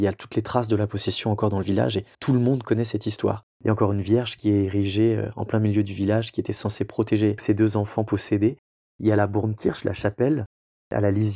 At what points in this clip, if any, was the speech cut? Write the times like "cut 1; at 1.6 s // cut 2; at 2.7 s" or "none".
cut 1; at 2.1 s // cut 2; at 3.5 s